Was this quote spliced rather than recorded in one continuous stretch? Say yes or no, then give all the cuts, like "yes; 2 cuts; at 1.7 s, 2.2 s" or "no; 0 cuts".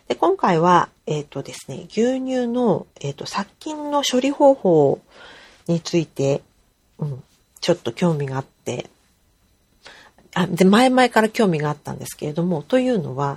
no; 0 cuts